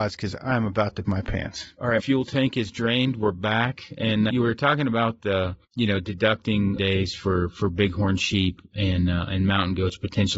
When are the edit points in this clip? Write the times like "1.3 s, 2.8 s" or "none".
1.0 s, 2.0 s, 4.3 s, 5.6 s, 6.8 s